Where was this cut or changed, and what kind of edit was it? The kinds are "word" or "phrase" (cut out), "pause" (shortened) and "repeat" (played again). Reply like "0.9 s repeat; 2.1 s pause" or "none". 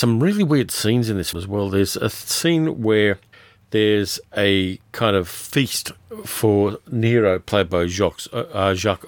1.3 s word; 3.3 s pause